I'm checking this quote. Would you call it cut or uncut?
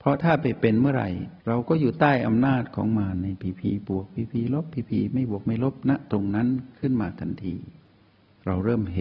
cut